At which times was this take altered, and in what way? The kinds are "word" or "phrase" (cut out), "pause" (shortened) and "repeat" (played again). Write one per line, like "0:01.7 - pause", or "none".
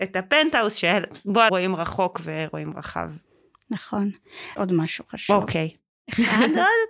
0:01.5 - word
0:04.6 - word